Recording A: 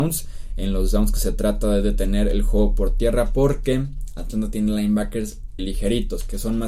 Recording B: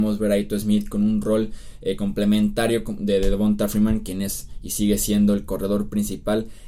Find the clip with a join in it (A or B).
A